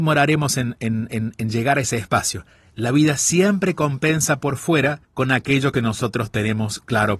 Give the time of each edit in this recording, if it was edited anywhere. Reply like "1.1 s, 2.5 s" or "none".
5.0 s